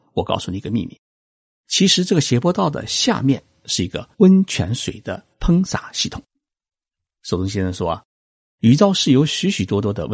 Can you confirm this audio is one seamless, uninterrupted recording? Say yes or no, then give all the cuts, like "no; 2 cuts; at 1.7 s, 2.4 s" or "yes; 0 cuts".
no; 2 cuts; at 4.1 s, 5.3 s